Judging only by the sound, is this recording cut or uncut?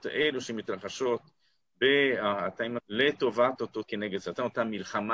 cut